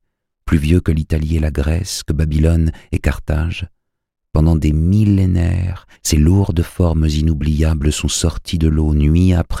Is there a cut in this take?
yes; 1 cut; at 5.9 s

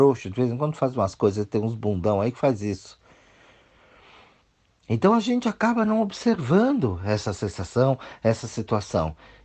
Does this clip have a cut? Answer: no; 0 cuts

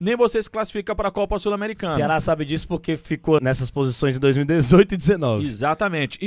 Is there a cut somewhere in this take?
yes; 1 cut; at 3.4 s

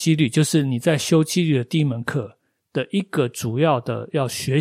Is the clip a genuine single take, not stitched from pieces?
yes; 0 cuts

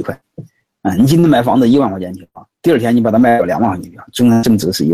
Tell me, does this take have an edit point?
no; 0 cuts

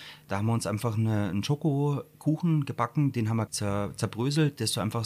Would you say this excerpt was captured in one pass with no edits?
no; 1 cut; at 3.5 s

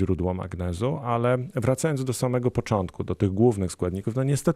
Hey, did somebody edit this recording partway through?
no; 0 cuts

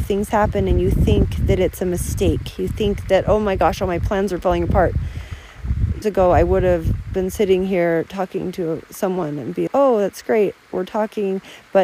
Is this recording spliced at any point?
yes; 2 cuts; at 6.0 s, 9.7 s

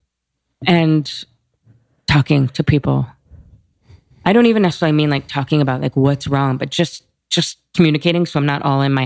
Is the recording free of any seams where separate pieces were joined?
yes; 0 cuts

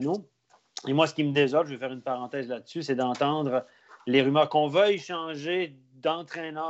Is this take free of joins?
yes; 0 cuts

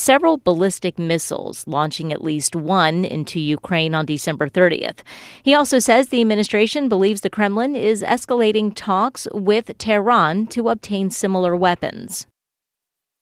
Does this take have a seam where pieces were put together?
no; 0 cuts

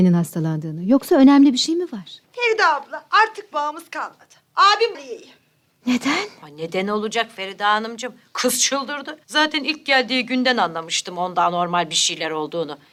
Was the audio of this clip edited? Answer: yes; 4 cuts; at 2.2 s, 3.5 s, 4.9 s, 9.2 s

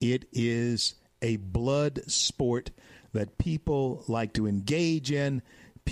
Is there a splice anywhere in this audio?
no; 0 cuts

